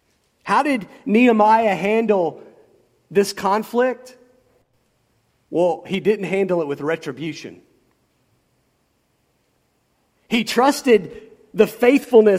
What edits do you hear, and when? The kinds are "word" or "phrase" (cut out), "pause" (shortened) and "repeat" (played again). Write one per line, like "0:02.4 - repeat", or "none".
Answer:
none